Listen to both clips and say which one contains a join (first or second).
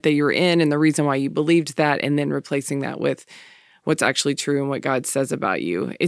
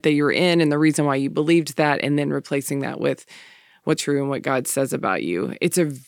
second